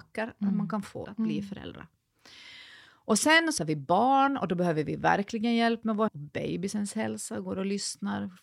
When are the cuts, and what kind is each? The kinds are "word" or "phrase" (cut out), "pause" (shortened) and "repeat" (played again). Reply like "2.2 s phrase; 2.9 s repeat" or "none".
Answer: 1.0 s phrase; 3.6 s word; 6.1 s word